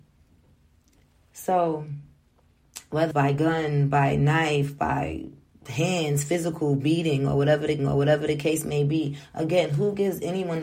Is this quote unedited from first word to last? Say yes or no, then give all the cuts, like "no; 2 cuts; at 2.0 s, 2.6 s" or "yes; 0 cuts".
no; 2 cuts; at 3.1 s, 7.8 s